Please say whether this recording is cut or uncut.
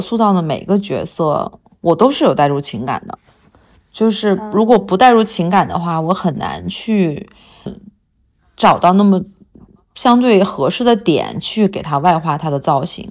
cut